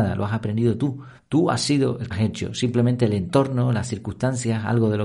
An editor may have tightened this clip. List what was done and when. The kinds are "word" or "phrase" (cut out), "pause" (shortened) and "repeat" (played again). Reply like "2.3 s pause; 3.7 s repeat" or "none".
1.2 s pause; 2.1 s phrase

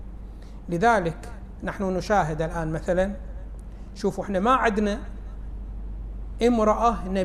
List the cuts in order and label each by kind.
none

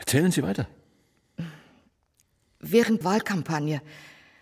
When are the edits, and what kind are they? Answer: 3.0 s word

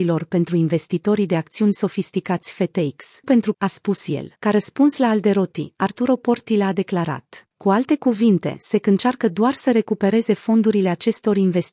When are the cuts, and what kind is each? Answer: 3.2 s word; 3.5 s word; 4.4 s pause; 7.5 s pause

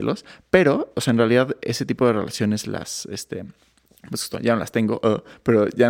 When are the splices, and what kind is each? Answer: none

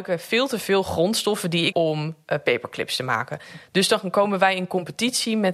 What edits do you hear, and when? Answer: 1.7 s phrase

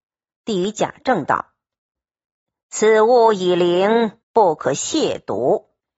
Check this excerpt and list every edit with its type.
4.2 s pause

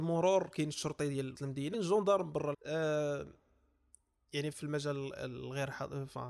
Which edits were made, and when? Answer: 1.3 s word; 1.7 s word; 2.5 s word; 4.5 s word

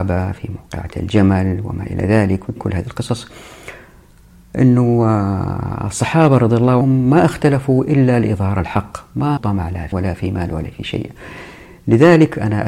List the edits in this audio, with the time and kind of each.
2.6 s word; 6.8 s word; 9.4 s word; 9.9 s word

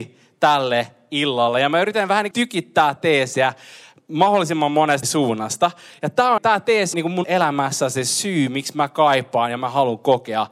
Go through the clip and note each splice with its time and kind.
2.3 s word; 3.0 s word; 5.0 s word; 6.4 s word; 6.9 s word; 7.2 s word

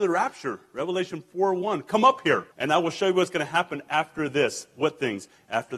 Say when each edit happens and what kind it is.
2.5 s pause

